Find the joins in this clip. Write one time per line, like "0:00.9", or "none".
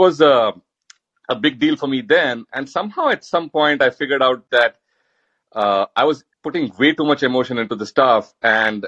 0:06.3